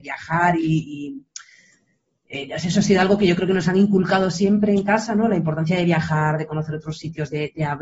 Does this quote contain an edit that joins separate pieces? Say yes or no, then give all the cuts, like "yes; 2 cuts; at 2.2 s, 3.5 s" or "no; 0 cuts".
no; 0 cuts